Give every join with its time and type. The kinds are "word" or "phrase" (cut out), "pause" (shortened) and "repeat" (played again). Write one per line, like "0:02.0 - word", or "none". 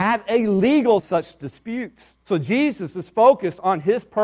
0:01.0 - phrase
0:02.2 - pause